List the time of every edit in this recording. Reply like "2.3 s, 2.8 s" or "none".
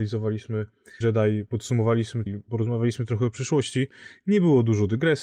1.0 s, 2.3 s